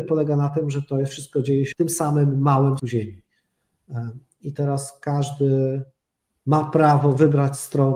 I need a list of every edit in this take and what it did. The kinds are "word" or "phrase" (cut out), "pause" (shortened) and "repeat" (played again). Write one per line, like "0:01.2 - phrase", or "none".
0:01.7 - word
0:02.8 - word